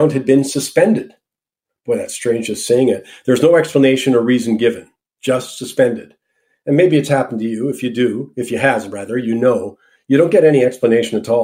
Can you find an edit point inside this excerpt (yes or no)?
no